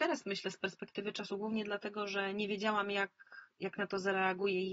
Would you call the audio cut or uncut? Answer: uncut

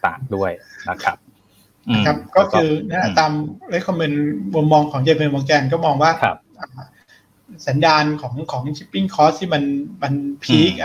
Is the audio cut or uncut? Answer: cut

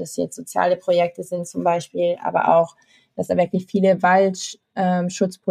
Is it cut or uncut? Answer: uncut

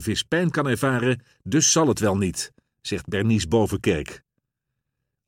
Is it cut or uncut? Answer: uncut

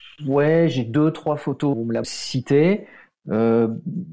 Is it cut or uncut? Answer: cut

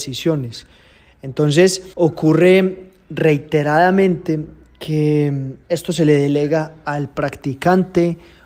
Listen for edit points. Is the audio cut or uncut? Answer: cut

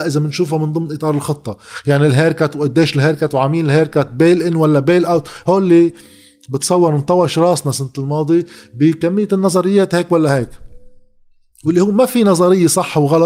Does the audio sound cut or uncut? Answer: uncut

